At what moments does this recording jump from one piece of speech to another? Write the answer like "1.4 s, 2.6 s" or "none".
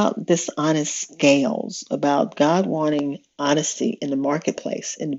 none